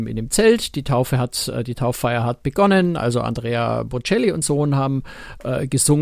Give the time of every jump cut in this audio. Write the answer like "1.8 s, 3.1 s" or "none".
4.4 s